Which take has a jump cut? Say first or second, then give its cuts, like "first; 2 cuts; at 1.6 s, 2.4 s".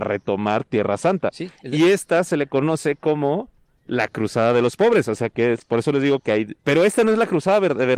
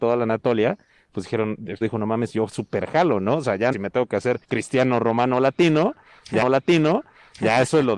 second; 4 cuts; at 1.8 s, 3.7 s, 4.4 s, 6.4 s